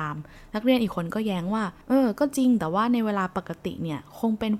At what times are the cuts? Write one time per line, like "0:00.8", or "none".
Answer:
0:01.8